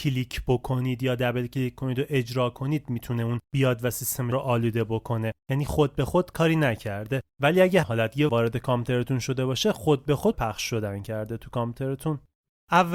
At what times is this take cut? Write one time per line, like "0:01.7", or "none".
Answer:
0:03.4
0:04.3
0:05.4
0:07.3
0:07.8
0:08.3
0:10.3